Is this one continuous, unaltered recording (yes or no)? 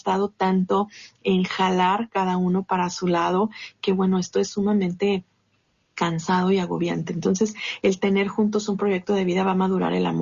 yes